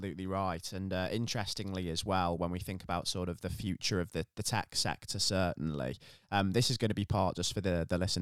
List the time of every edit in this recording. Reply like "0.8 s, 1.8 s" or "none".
none